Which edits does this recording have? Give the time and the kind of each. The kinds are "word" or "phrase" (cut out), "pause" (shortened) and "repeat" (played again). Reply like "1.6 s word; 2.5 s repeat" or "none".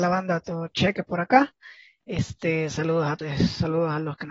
3.2 s word